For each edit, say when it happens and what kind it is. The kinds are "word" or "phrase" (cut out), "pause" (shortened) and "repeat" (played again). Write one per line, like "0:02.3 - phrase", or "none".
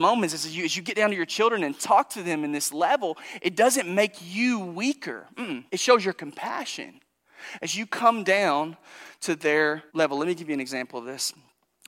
0:05.7 - pause
0:09.9 - pause